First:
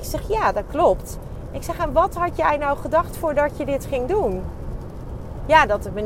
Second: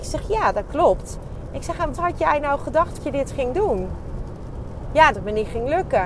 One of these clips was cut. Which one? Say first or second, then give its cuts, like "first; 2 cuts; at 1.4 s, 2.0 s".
second; 3 cuts; at 1.9 s, 3.0 s, 5.1 s